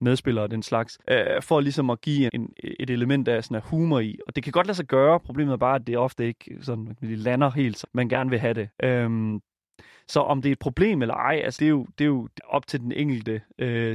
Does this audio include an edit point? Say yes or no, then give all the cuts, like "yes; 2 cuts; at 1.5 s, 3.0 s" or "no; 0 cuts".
yes; 6 cuts; at 1.0 s, 2.3 s, 7.8 s, 8.7 s, 11.6 s, 12.4 s